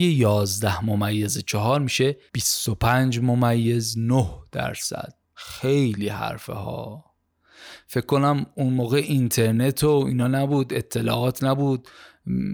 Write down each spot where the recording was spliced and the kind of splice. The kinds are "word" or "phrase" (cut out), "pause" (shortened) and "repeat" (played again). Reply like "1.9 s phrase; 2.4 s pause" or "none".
2.3 s pause; 5.2 s pause